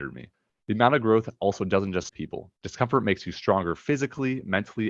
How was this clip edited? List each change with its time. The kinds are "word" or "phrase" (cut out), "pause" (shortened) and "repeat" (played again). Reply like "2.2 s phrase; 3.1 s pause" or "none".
2.1 s phrase; 2.6 s pause